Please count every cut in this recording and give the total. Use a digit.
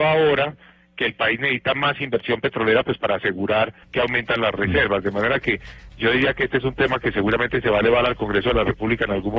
1